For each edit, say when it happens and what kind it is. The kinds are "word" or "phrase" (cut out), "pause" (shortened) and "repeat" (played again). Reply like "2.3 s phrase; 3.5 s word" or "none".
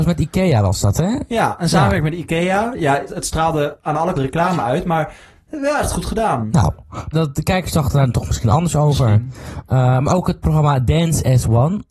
3.1 s word; 4.1 s word; 7.1 s word

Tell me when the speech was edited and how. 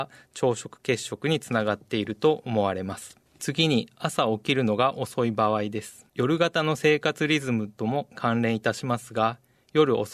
3.3 s pause; 6.1 s pause

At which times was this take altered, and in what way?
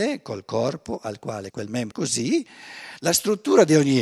1.5 s word; 1.9 s word

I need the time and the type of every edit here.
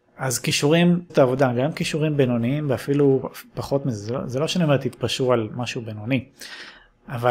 1.1 s word

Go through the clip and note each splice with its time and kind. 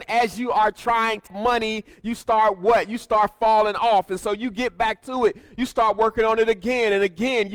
1.3 s word

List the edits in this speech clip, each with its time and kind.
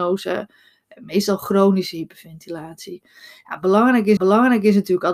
4.2 s repeat

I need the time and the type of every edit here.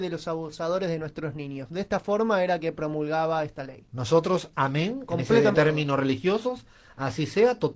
5.5 s word

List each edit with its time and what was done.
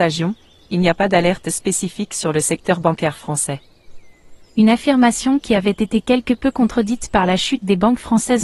none

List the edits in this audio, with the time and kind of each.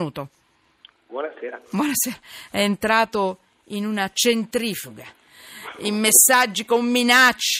none

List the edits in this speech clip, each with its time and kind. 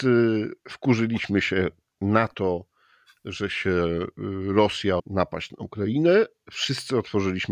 5.0 s word

